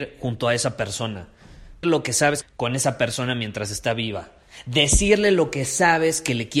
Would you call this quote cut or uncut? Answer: cut